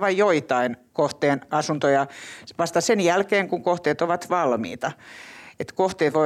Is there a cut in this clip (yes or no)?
no